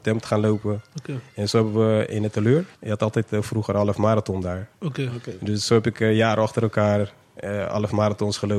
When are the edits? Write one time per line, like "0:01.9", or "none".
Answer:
0:02.7

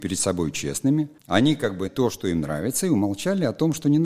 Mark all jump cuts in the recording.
0:01.2
0:01.9

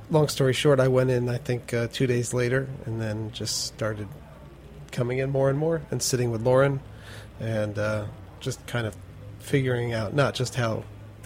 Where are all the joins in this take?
none

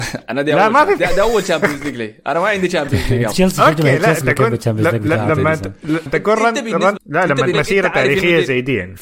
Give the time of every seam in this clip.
0:01.0
0:03.3
0:04.2
0:06.1
0:07.0
0:07.5

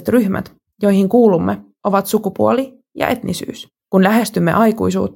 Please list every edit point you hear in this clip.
0:03.8

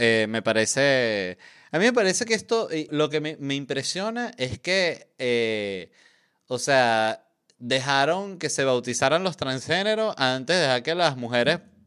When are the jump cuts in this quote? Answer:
0:02.9

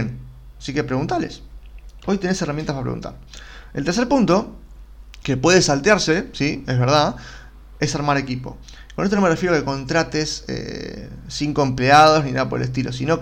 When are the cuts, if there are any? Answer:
none

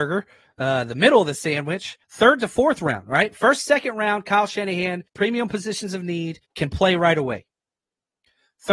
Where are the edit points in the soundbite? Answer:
0:02.0
0:05.1
0:06.4

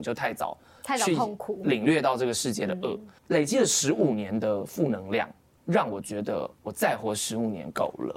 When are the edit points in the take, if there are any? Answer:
0:03.2

